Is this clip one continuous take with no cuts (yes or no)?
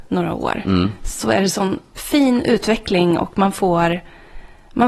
yes